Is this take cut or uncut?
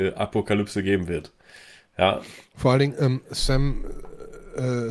uncut